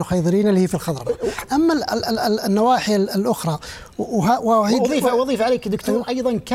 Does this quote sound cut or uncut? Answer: uncut